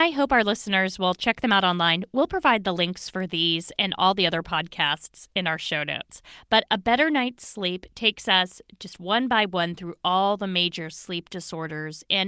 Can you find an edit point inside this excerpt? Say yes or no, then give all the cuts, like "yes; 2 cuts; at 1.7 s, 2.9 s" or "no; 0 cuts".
no; 0 cuts